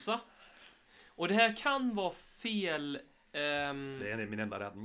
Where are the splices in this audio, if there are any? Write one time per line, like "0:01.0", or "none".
none